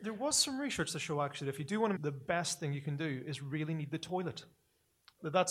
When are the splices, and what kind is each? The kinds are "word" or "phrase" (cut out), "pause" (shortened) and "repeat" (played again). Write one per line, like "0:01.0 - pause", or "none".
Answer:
0:02.0 - phrase

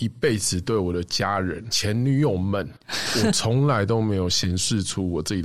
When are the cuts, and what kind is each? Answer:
0:02.8 - pause

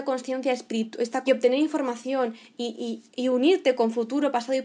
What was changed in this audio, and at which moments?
0:01.3 - phrase

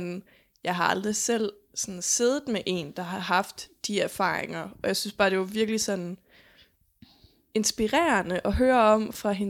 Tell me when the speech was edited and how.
none

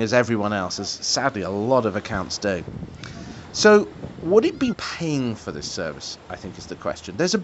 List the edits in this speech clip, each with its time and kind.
0:04.7 - word

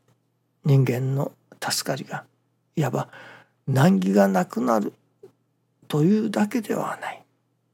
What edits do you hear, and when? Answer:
none

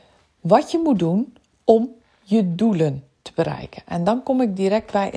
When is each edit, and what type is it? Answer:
none

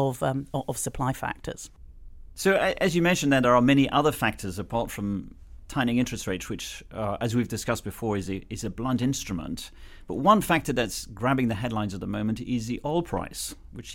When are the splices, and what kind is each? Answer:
none

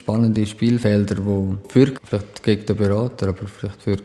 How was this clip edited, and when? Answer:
0:01.9 - phrase

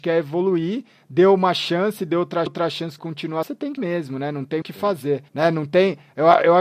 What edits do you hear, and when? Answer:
0:02.5 - repeat
0:03.0 - word
0:03.4 - word
0:03.8 - word
0:04.6 - word
0:05.3 - pause

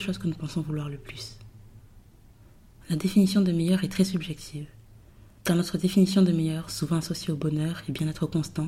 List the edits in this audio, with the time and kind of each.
0:05.4 - pause

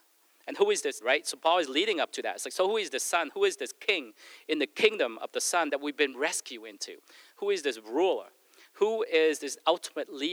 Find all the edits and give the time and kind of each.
0:01.0 - word

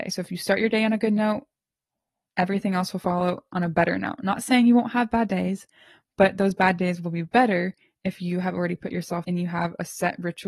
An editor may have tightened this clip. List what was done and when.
0:09.2 - word

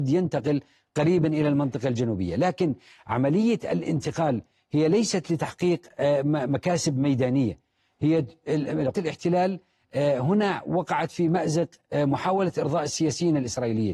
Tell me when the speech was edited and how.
0:08.9 - word

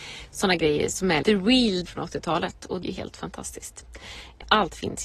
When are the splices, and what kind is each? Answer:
0:01.2 - word
0:01.9 - word
0:02.8 - word

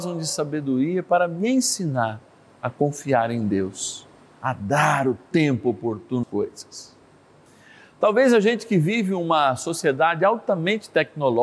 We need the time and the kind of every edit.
0:06.2 - word

